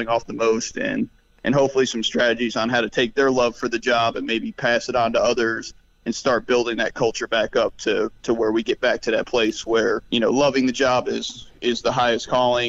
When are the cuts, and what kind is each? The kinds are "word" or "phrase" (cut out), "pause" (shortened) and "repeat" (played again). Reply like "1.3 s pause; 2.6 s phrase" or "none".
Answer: 10.1 s pause